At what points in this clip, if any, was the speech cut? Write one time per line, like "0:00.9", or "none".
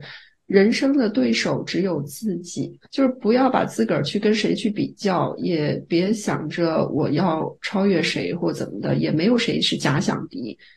0:02.9